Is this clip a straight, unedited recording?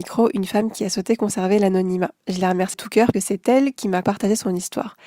no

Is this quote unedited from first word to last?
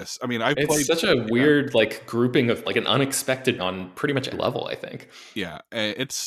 no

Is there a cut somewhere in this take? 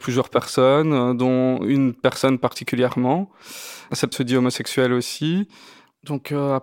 yes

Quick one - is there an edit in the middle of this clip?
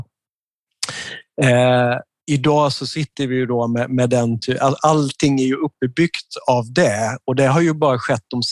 no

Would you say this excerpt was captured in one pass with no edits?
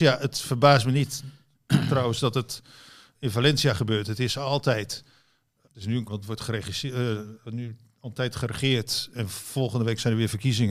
no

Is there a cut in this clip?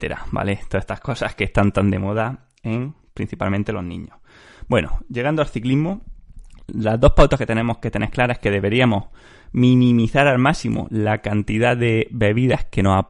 no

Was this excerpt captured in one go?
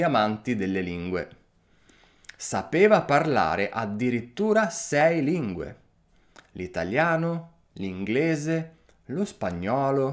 yes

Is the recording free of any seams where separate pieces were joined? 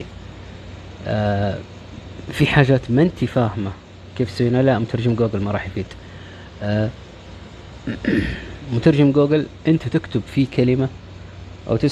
yes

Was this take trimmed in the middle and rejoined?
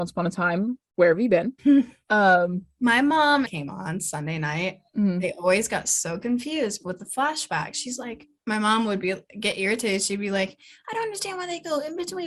yes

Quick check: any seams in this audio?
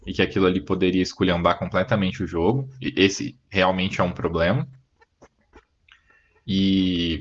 no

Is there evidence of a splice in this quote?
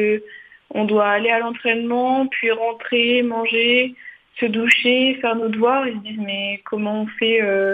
no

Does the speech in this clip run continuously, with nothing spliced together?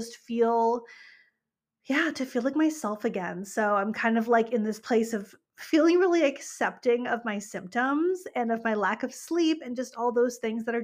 yes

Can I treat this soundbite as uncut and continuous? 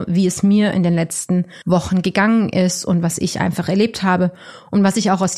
no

